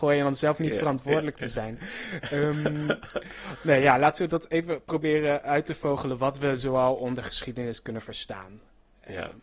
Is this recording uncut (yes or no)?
yes